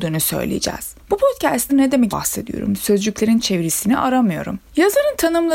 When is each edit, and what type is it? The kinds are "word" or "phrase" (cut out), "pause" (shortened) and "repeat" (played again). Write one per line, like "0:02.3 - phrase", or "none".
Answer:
0:01.7 - word
0:02.1 - word
0:03.4 - word

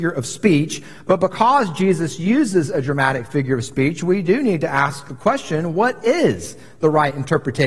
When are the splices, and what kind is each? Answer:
none

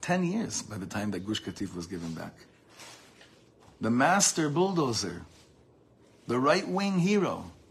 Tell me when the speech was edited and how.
none

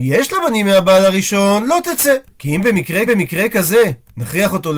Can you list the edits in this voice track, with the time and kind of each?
0:02.3 - pause
0:03.1 - repeat

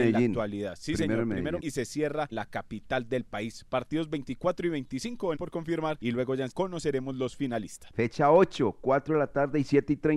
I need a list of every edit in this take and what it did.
0:01.6 - word
0:02.3 - word
0:05.4 - word
0:06.5 - word

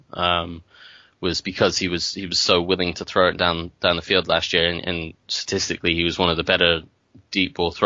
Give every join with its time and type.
none

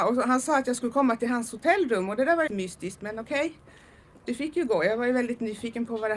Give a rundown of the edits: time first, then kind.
0:02.5 - word

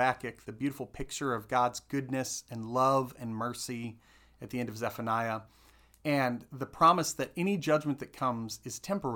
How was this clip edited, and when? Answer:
none

